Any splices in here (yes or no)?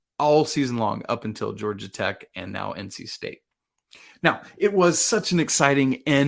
no